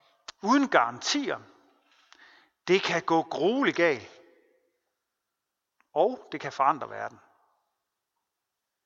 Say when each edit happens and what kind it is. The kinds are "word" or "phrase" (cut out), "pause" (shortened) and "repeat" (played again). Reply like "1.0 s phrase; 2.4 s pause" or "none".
none